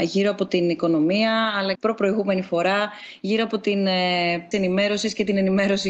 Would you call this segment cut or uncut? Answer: cut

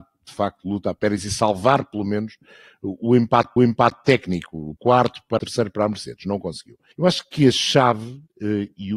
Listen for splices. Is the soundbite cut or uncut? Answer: cut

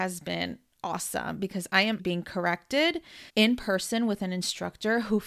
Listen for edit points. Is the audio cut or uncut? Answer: cut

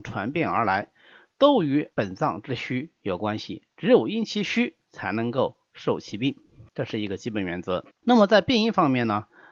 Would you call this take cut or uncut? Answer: cut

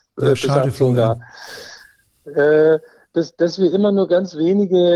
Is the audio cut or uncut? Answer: uncut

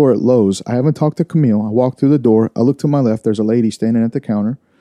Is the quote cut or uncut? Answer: uncut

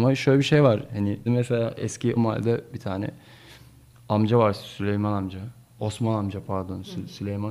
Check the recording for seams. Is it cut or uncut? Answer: cut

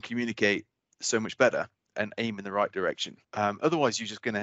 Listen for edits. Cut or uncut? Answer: cut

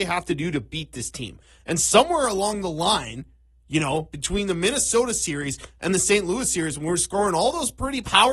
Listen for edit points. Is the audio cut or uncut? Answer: uncut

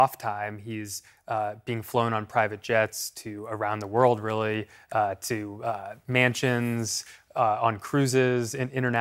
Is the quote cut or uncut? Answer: uncut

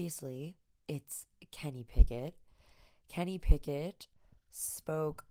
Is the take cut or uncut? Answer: uncut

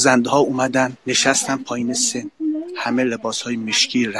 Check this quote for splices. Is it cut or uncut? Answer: cut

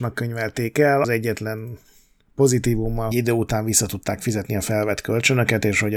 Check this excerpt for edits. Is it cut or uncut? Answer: cut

